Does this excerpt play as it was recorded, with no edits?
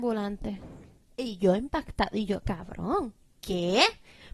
yes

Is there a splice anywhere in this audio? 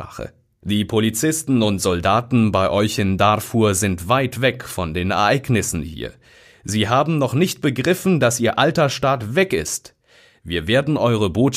no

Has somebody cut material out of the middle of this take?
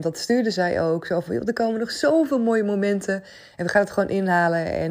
no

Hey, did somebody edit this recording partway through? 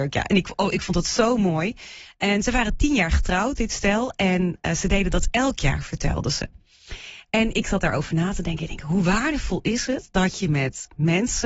no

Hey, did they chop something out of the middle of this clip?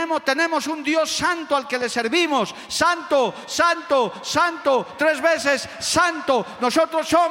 no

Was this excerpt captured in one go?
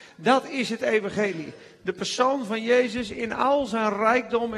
yes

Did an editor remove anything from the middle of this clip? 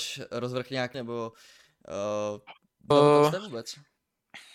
yes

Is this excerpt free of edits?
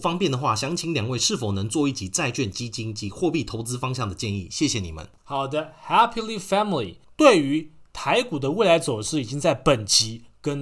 yes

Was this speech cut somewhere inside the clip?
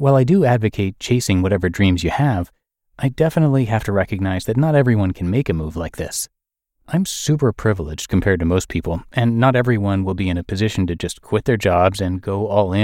no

